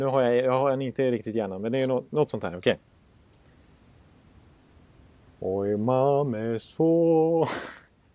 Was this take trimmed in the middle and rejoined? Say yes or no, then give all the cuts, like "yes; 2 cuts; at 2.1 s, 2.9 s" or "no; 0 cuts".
no; 0 cuts